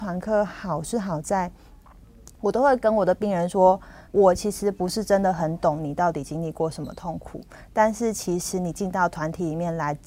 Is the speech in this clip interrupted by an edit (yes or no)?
yes